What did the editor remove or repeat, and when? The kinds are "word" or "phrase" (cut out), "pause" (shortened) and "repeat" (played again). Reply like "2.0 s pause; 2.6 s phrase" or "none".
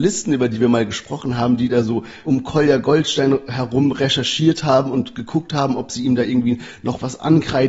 2.2 s word